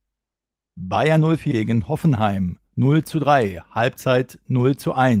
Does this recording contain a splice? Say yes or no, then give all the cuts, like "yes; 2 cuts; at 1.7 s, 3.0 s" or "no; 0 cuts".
yes; 2 cuts; at 1.5 s, 2.7 s